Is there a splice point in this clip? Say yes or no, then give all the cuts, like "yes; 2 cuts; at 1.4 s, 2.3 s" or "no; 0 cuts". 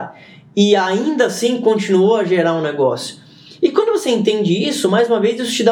no; 0 cuts